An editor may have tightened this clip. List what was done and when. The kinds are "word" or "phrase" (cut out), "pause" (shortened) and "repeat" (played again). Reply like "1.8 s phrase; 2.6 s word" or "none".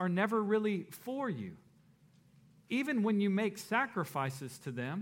none

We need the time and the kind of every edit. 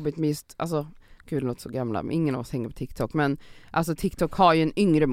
none

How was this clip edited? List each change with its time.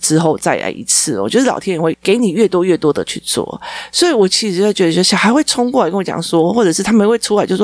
3.0 s word

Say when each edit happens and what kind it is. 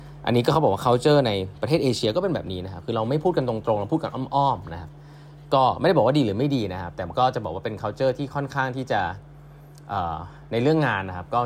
none

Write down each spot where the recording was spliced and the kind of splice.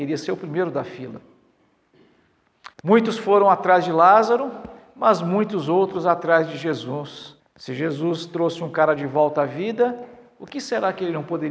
2.7 s pause; 7.4 s pause

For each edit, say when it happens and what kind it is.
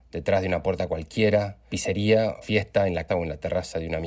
1.7 s word; 2.4 s word; 3.1 s word

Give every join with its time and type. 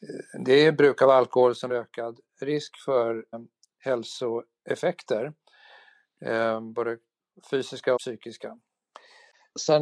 1.7 s word; 3.3 s word; 8.0 s word

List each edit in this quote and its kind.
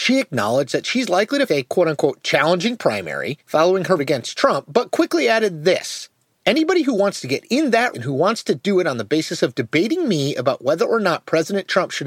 1.5 s word; 4.0 s word; 7.9 s word

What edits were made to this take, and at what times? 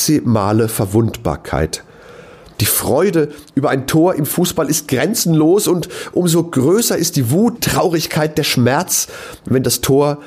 7.6 s word

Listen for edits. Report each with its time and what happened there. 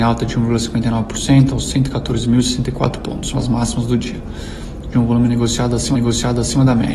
3.3 s word; 4.9 s phrase; 5.9 s repeat

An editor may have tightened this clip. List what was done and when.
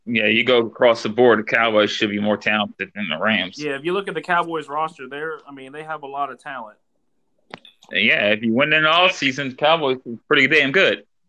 none

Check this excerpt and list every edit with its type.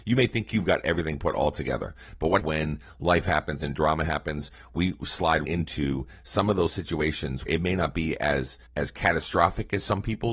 2.4 s word; 5.4 s word; 7.5 s word; 8.7 s pause

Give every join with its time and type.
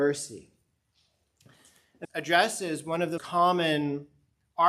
2.0 s word; 3.2 s word

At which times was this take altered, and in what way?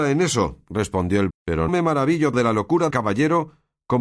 1.3 s word; 1.7 s word; 2.3 s word; 2.9 s word

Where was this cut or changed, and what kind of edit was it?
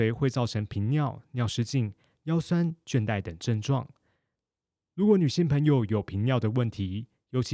none

